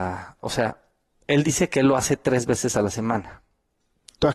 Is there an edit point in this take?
no; 0 cuts

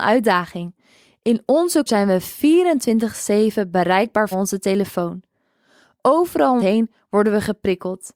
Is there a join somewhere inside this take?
yes; 3 cuts; at 1.9 s, 4.3 s, 6.6 s

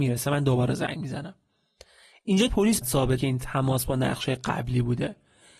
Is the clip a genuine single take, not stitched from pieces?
no; 3 cuts; at 2.5 s, 2.8 s, 3.2 s

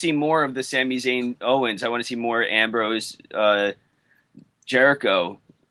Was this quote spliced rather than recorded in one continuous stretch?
no; 0 cuts

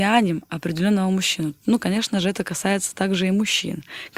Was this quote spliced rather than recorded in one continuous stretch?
no; 0 cuts

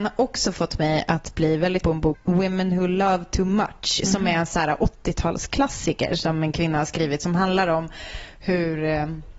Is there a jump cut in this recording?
yes; 2 cuts; at 1.8 s, 2.1 s

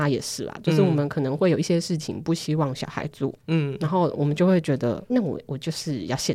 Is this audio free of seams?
no; 2 cuts; at 3.4 s, 5.1 s

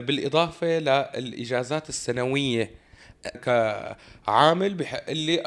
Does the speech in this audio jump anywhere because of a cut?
yes; 1 cut; at 3.3 s

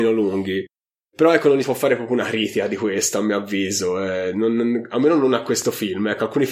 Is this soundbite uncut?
no; 1 cut; at 1.6 s

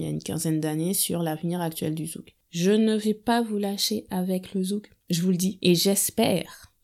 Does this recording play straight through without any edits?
yes; 0 cuts

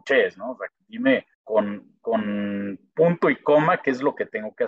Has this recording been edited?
yes; 1 cut; at 1.3 s

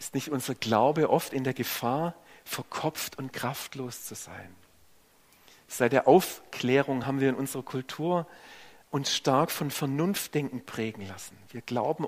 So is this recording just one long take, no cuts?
yes; 0 cuts

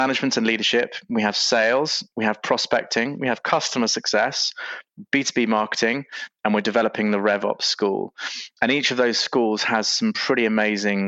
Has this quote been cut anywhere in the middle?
no; 0 cuts

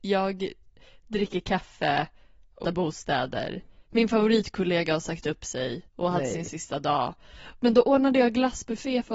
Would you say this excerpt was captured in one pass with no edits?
no; 3 cuts; at 2.6 s, 3.9 s, 5.9 s

